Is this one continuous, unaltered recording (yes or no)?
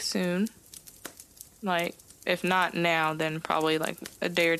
yes